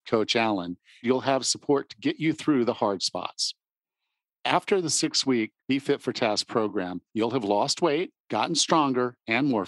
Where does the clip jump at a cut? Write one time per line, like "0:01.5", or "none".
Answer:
0:01.0
0:05.6
0:07.1
0:08.2